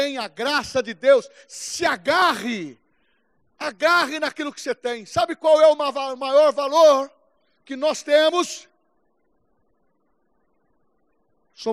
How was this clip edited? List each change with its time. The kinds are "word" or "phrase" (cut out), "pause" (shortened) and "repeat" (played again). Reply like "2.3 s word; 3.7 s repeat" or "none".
none